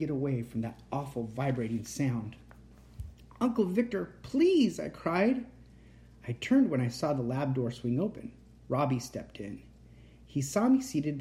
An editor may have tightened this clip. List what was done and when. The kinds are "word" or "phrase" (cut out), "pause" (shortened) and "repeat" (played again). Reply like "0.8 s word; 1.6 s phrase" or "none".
none